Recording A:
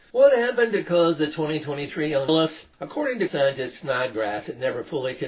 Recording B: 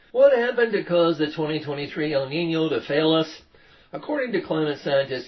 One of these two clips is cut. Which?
A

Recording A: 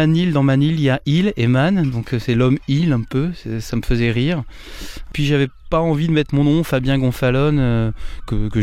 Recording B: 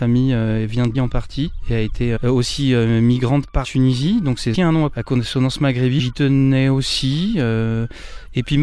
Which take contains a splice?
B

